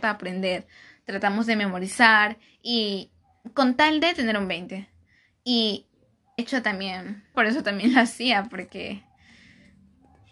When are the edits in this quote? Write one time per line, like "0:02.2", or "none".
0:06.4
0:07.3

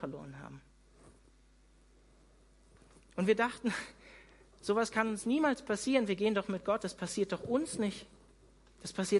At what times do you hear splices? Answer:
none

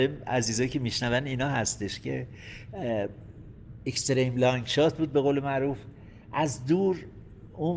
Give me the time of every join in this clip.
none

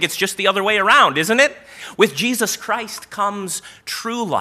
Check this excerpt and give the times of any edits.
none

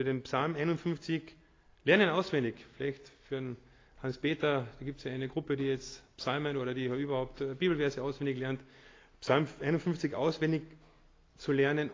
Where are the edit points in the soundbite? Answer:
none

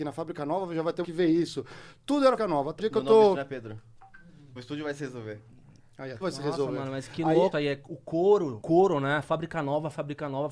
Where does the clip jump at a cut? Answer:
0:01.0
0:02.4
0:02.8
0:03.3
0:04.6
0:06.2
0:07.5
0:08.6

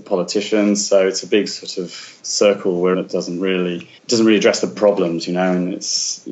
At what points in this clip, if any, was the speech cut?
0:02.2
0:02.9
0:04.0
0:04.8

